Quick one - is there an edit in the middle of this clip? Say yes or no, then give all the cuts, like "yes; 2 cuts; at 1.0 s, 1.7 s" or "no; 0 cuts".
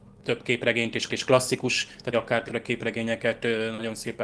yes; 3 cuts; at 1.1 s, 2.1 s, 2.5 s